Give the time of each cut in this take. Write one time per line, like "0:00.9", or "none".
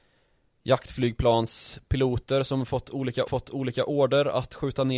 0:03.3